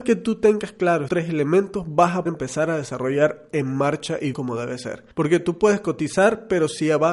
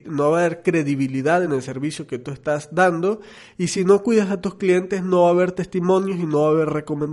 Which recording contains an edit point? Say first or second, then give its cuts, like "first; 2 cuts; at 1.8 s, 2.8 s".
first; 5 cuts; at 1.1 s, 2.3 s, 3.5 s, 4.3 s, 5.1 s